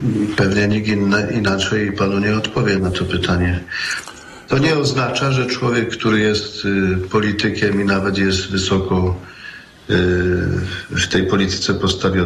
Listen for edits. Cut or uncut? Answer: uncut